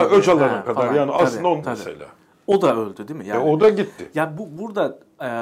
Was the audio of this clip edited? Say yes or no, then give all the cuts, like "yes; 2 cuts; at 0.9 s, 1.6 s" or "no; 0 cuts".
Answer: yes; 1 cut; at 1.6 s